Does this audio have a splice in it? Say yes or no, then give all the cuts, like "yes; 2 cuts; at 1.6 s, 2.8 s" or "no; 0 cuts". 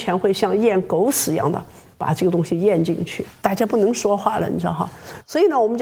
no; 0 cuts